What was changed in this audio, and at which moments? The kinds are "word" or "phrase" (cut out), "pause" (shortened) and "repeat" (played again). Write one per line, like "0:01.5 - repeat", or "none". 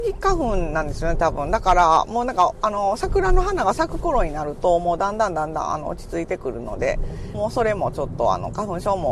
0:07.3 - phrase